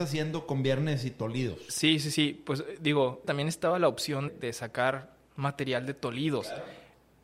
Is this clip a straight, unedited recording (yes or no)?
no